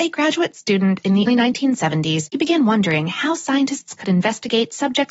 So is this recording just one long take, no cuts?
no; 2 cuts; at 1.3 s, 2.3 s

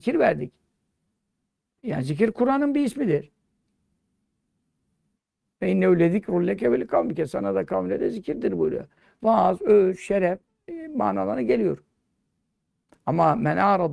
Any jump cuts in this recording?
no; 0 cuts

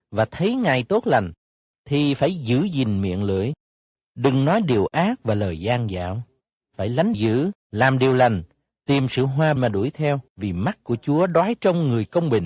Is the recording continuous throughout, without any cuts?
no; 4 cuts; at 6.4 s, 7.1 s, 9.6 s, 10.3 s

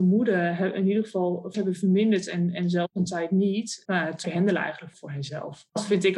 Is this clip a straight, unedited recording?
no; 4 cuts; at 1.5 s, 3.8 s, 4.2 s, 4.9 s

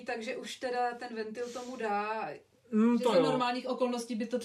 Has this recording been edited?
no; 0 cuts

